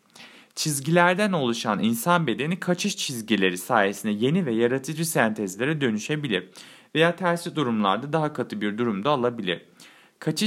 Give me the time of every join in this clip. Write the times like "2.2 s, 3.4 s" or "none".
none